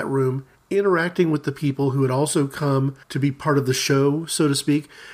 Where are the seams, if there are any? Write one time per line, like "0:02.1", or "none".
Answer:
0:03.0

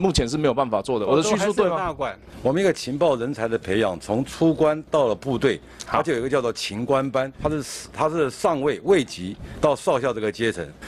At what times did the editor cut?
0:07.3

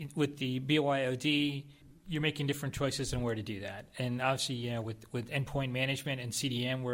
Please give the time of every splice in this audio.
none

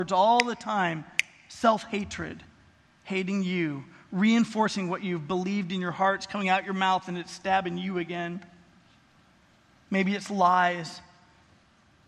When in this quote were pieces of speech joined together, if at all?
none

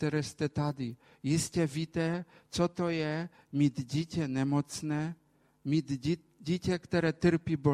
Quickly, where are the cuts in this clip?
none

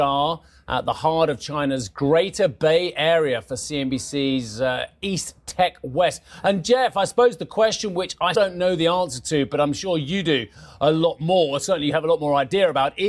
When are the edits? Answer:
0:08.3

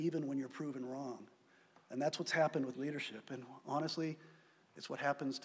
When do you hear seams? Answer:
0:02.7

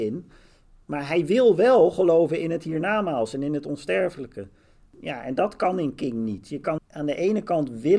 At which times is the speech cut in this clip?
0:06.8

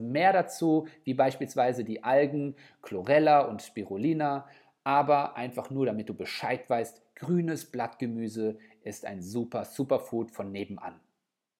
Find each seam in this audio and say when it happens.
none

